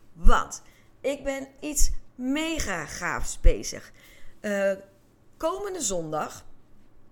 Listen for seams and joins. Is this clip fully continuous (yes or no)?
no